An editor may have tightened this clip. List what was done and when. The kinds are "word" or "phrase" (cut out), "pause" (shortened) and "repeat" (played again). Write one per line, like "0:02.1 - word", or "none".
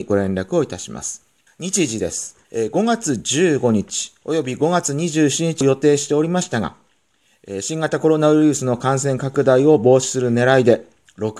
0:01.5 - pause
0:02.4 - pause